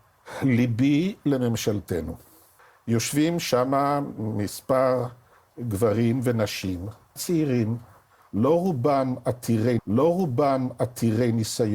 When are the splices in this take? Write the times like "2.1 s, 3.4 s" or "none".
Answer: 2.6 s, 7.2 s, 9.8 s